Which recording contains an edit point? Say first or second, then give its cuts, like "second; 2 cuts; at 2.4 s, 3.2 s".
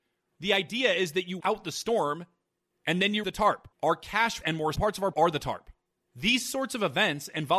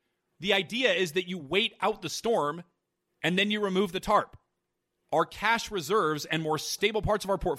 first; 6 cuts; at 1.4 s, 3.2 s, 3.7 s, 4.4 s, 4.7 s, 5.1 s